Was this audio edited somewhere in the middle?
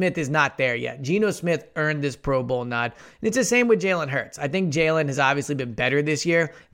no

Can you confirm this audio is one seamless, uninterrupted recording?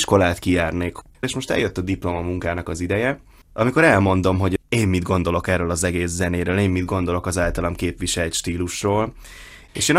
yes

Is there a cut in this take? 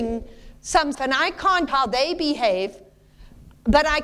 yes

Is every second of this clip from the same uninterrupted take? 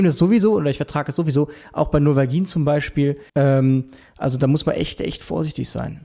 no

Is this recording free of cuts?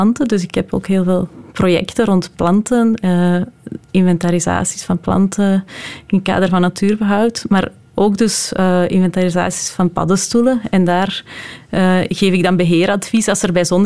yes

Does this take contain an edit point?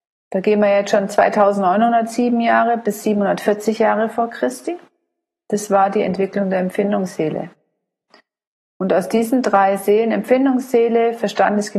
no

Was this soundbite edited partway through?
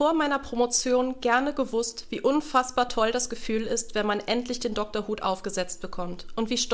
no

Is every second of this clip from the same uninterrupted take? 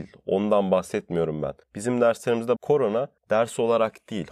no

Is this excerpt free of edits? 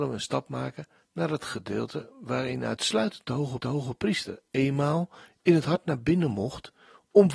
no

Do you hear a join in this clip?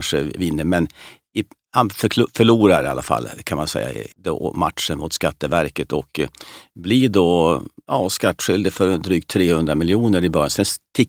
yes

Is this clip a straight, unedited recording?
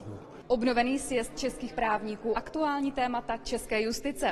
no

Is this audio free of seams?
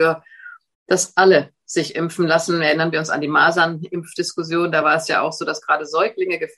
yes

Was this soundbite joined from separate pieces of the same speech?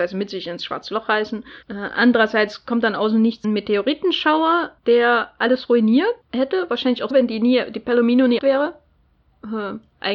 yes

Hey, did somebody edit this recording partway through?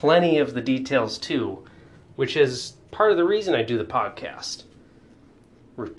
no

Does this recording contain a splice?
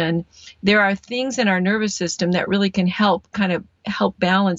no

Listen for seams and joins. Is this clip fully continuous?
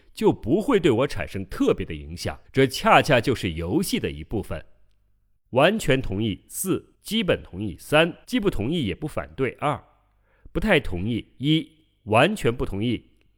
no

